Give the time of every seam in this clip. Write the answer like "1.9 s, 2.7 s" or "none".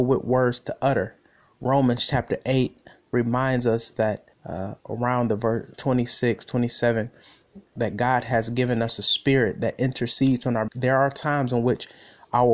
4.3 s, 5.7 s, 10.7 s

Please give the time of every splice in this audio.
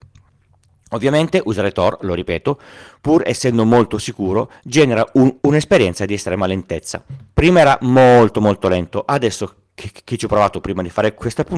5.4 s

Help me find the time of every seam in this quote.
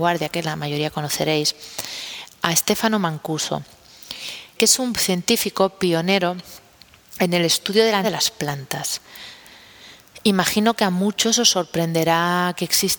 4.6 s, 8.0 s

